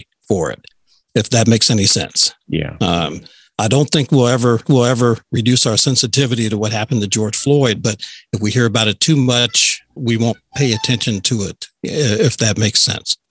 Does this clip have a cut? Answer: yes; 1 cut; at 4.6 s

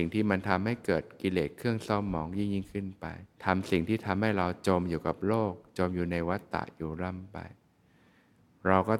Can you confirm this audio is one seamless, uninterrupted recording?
no; 1 cut; at 3.3 s

